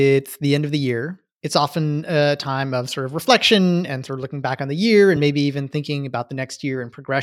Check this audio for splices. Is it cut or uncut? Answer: uncut